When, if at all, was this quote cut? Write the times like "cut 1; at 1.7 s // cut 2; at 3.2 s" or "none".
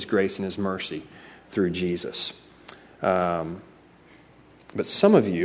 none